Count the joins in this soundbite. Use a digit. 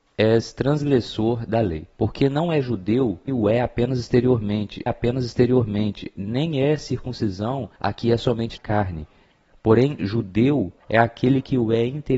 6